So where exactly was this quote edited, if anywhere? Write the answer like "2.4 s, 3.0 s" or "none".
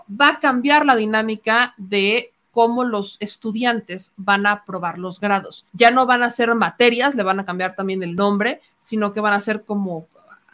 5.7 s